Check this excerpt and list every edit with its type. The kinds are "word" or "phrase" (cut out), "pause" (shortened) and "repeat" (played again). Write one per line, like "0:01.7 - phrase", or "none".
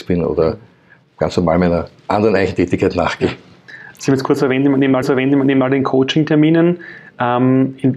0:05.0 - repeat